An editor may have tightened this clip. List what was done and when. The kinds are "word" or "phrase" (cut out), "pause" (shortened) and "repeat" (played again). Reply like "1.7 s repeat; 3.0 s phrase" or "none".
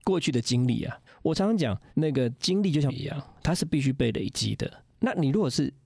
1.1 s pause; 1.9 s pause; 2.9 s word

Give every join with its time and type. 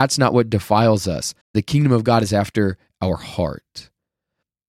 1.4 s pause

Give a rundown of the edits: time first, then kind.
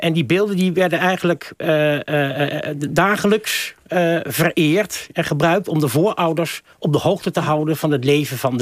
none

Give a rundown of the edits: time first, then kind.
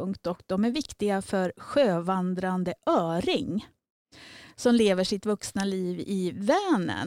none

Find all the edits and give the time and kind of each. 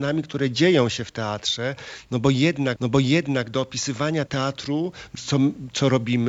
2.8 s repeat; 4.3 s word; 5.1 s phrase

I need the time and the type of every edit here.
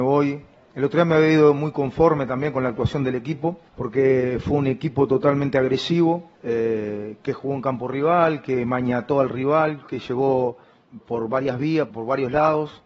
3.7 s pause; 6.4 s pause; 11.0 s word; 11.9 s word

